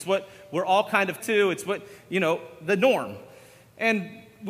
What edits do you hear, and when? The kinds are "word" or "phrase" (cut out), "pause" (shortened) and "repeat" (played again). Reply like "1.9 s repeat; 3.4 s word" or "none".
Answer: 1.2 s word